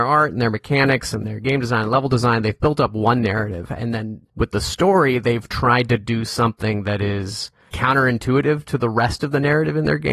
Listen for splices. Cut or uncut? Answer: cut